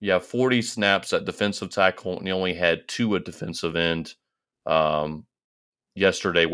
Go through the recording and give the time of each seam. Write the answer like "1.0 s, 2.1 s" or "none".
none